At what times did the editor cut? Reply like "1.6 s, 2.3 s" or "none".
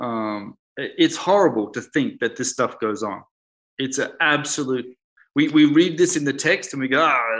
none